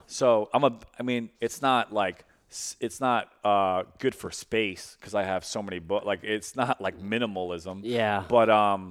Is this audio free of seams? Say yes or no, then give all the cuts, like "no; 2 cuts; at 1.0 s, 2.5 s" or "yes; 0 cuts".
no; 1 cut; at 1.3 s